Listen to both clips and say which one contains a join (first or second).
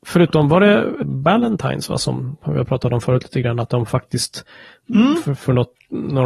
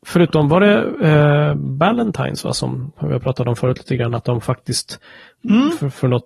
first